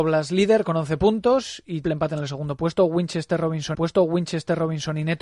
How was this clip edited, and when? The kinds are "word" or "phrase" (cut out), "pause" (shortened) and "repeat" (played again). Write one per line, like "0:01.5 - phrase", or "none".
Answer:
0:01.8 - word
0:03.7 - repeat

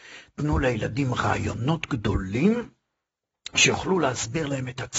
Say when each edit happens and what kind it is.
none

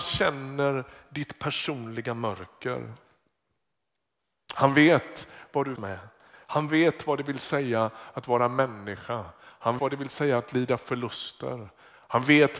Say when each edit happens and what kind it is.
0:05.8 - word
0:09.8 - word

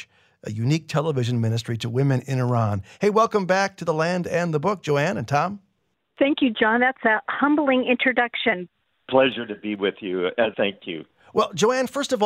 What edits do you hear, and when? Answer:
0:10.5 - word

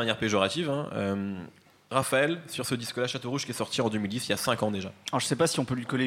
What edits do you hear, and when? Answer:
none

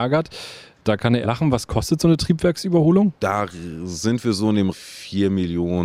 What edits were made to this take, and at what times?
0:01.2 - phrase
0:04.7 - phrase

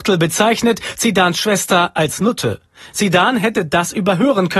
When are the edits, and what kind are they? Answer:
none

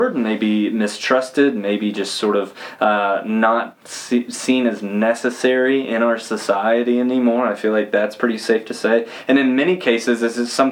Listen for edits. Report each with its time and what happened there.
none

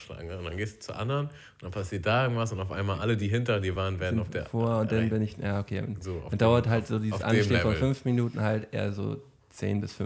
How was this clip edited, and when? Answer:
none

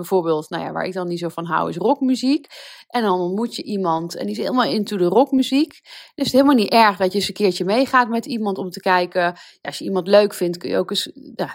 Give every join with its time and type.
none

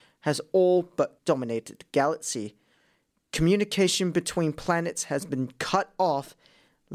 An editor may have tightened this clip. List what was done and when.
0:01.2 - word

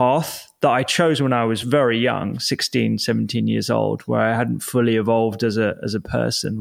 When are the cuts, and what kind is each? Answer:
none

